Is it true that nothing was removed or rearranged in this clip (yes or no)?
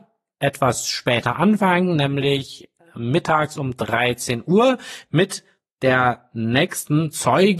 yes